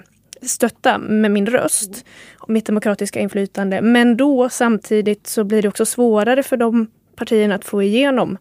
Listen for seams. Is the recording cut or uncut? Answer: uncut